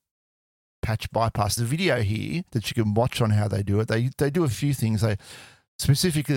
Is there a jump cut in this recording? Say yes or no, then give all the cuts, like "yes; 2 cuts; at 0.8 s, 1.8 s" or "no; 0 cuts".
yes; 2 cuts; at 1.6 s, 2.5 s